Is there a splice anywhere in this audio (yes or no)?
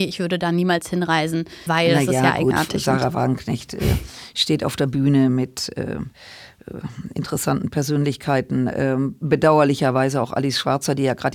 yes